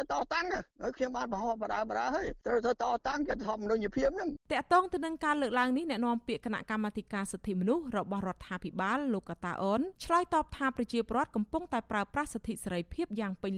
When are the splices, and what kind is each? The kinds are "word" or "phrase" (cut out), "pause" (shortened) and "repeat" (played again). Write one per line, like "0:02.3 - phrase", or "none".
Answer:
0:10.0 - pause